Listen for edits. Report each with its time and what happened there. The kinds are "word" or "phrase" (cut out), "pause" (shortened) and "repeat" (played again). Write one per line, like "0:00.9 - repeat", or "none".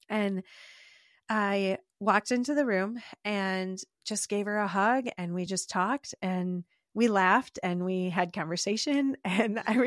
none